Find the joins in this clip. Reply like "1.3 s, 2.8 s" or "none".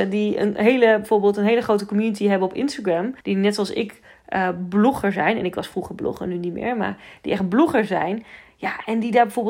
3.2 s

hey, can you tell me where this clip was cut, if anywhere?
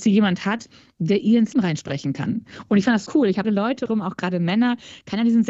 1.5 s, 3.1 s, 3.4 s, 3.9 s

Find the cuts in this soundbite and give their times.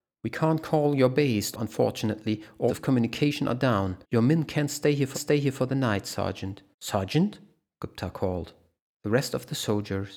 1.5 s, 2.7 s, 4.0 s, 5.1 s, 6.7 s, 8.8 s

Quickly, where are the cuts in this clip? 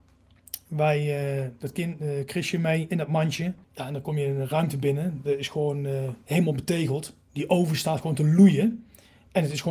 3.6 s

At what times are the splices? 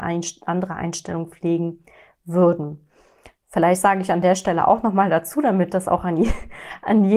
none

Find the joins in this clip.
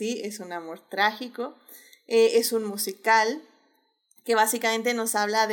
none

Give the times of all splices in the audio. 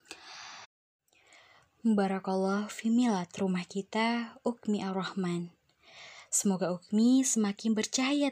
none

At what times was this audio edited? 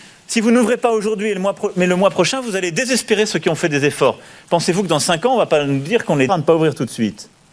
6.3 s

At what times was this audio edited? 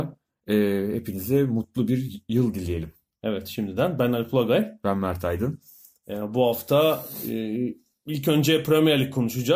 none

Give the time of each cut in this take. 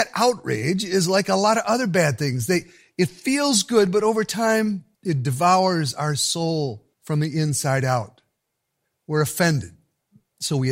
4.9 s, 6.9 s

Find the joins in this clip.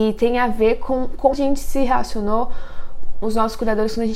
1.3 s, 3.2 s

